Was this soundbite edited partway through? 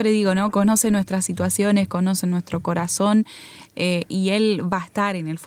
no; 0 cuts

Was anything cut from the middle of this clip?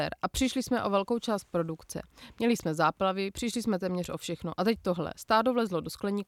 no; 0 cuts

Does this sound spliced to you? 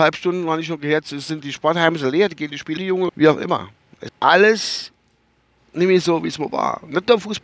yes; 4 cuts; at 1.4 s, 2.8 s, 3.1 s, 4.1 s

